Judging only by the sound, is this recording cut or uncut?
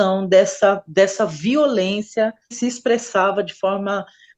cut